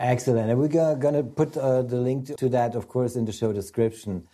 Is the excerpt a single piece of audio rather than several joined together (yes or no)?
no